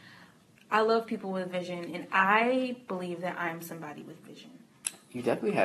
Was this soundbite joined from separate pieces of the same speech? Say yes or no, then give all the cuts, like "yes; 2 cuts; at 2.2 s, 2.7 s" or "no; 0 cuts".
no; 0 cuts